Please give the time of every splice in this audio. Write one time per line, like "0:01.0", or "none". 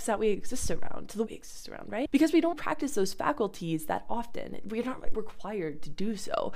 0:01.3
0:02.5
0:05.1